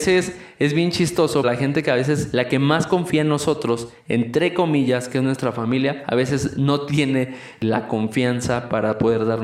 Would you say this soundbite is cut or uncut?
cut